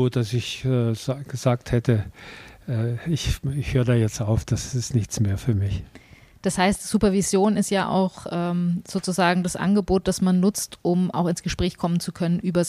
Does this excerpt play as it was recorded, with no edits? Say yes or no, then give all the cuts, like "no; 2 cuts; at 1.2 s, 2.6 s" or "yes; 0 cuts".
yes; 0 cuts